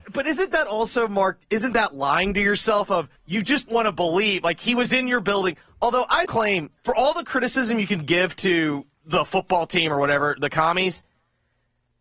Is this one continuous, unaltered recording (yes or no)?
no